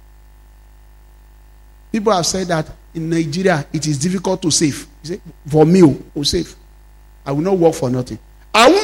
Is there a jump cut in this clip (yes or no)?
yes